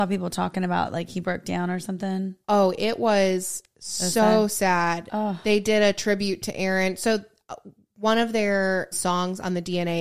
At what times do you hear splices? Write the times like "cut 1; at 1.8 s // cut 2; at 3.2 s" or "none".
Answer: cut 1; at 8.9 s